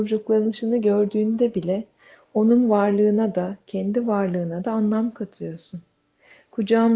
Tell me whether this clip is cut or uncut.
uncut